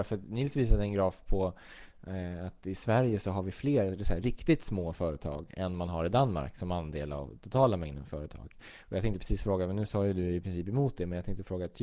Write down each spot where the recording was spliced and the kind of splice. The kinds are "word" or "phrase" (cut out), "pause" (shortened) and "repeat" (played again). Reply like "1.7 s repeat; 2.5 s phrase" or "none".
none